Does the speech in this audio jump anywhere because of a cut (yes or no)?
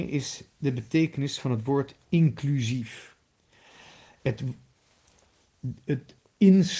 no